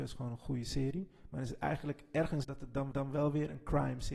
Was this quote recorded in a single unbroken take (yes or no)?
no